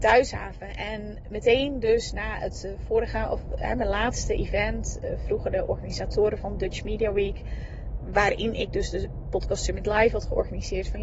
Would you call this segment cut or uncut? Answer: uncut